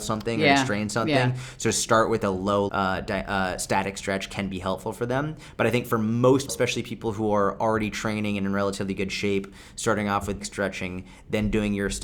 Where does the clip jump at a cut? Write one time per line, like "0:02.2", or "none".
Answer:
0:02.7
0:06.5
0:10.4